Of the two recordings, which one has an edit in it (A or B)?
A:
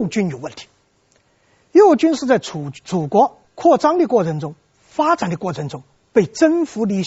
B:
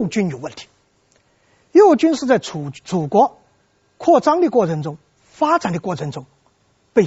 A